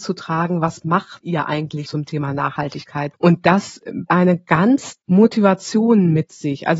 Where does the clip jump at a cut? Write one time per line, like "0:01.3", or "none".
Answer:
0:01.8
0:04.1
0:05.0

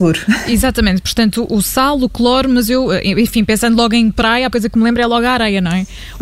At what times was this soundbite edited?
0:04.5

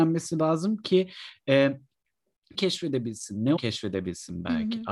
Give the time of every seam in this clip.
0:02.6
0:03.6

